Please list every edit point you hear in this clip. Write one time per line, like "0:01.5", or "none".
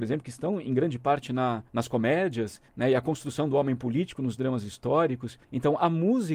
0:01.7
0:02.7
0:05.4